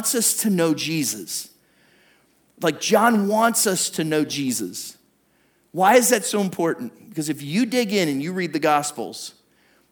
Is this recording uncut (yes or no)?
yes